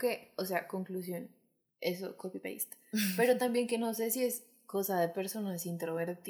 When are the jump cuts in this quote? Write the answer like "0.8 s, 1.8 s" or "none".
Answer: none